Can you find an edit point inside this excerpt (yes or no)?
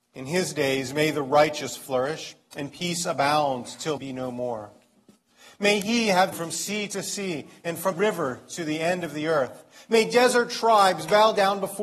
yes